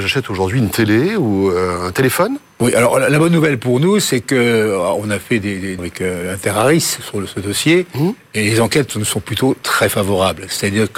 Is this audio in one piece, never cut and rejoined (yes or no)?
no